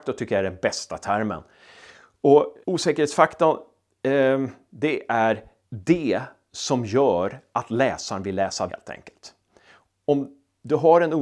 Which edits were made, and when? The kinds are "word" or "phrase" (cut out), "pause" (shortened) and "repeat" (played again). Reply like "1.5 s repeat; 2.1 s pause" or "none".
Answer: 2.6 s pause; 5.6 s pause; 8.7 s word